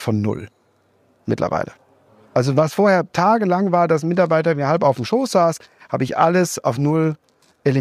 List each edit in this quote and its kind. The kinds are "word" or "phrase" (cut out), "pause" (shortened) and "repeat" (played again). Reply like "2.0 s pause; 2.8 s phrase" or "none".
none

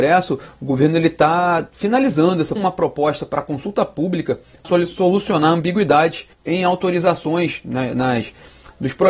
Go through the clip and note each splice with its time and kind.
2.6 s phrase; 4.6 s word; 6.3 s pause

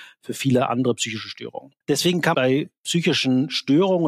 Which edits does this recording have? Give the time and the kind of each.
1.8 s pause; 2.3 s word

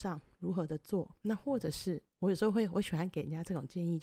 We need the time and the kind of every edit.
none

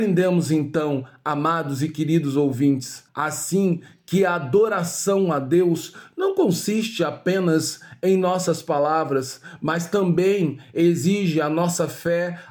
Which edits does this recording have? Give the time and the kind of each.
3.1 s pause

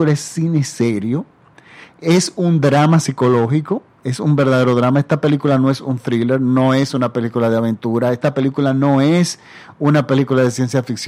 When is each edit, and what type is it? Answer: none

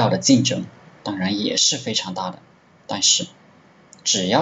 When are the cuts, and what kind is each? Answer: 2.5 s pause

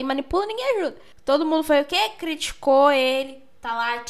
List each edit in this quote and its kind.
none

